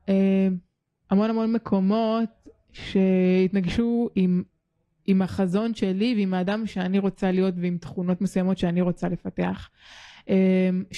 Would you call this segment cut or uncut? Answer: uncut